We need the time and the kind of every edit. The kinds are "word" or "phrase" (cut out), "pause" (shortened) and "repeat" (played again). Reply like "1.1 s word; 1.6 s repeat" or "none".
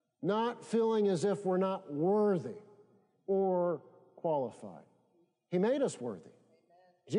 none